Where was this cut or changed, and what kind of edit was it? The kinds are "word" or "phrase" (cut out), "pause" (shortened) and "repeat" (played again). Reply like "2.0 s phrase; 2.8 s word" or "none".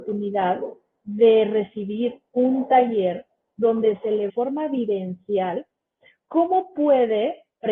4.3 s phrase